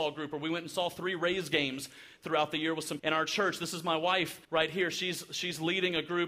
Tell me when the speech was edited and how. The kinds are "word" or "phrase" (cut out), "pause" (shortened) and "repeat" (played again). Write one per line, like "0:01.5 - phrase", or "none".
0:03.0 - word
0:04.4 - pause